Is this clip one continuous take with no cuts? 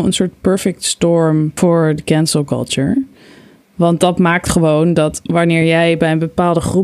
yes; 0 cuts

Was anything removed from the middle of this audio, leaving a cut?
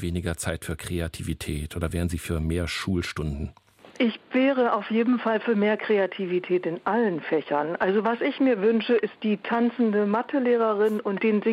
no; 0 cuts

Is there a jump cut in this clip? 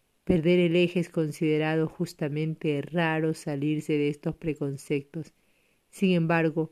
no; 0 cuts

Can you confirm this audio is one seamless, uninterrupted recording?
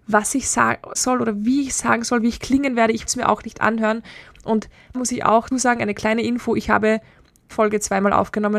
no; 6 cuts; at 1.0 s, 3.1 s, 3.4 s, 4.9 s, 5.5 s, 7.5 s

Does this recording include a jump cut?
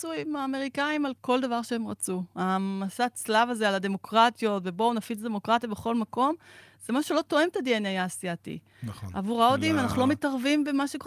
no; 0 cuts

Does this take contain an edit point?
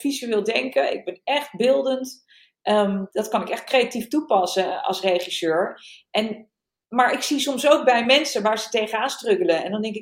no; 0 cuts

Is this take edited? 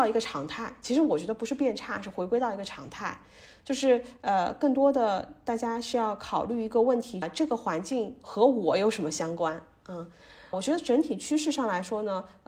yes; 2 cuts; at 7.2 s, 10.5 s

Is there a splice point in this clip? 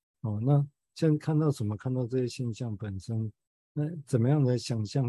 no; 0 cuts

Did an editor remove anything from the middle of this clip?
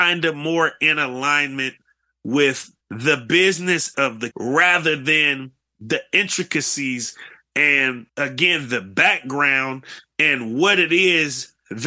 yes; 4 cuts; at 2.8 s, 3.9 s, 4.3 s, 8.1 s

